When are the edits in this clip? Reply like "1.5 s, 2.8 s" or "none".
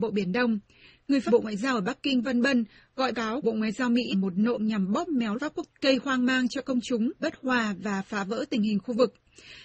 1.3 s, 2.2 s, 3.1 s, 3.4 s, 4.1 s, 4.5 s, 5.3 s, 5.7 s, 7.2 s